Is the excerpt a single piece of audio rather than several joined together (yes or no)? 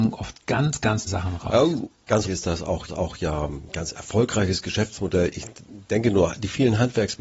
no